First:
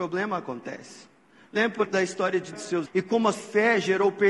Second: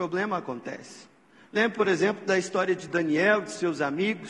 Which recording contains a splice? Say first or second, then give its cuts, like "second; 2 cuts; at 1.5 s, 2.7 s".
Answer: first; 4 cuts; at 1.8 s, 2.5 s, 2.9 s, 3.3 s